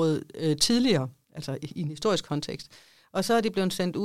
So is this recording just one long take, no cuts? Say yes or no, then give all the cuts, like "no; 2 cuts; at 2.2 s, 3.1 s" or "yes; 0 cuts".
yes; 0 cuts